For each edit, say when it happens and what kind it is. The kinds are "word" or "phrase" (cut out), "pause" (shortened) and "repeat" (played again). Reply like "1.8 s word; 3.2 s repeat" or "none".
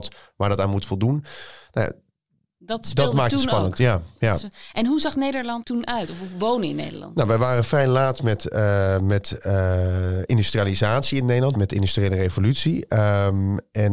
5.6 s word; 11.5 s word